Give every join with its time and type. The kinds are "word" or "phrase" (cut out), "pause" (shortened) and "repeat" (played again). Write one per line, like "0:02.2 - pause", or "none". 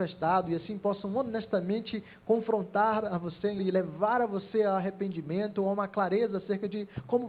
0:03.6 - word

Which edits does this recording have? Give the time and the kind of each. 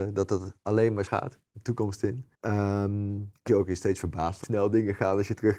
0:01.1 - word
0:01.5 - pause
0:02.3 - pause
0:03.5 - word
0:04.4 - word

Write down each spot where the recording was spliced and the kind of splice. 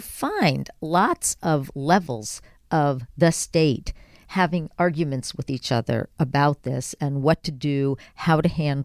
none

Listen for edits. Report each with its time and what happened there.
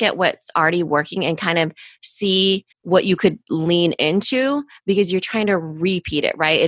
0:02.7 - pause

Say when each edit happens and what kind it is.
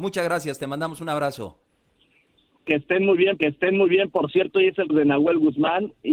0:03.4 - repeat
0:04.9 - word

